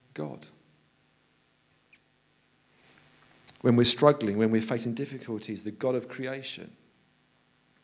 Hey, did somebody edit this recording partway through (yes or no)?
no